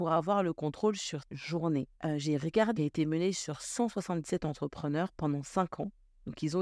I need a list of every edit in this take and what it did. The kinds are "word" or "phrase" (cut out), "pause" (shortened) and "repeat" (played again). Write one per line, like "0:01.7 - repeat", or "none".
0:01.2 - word
0:02.0 - pause
0:02.8 - phrase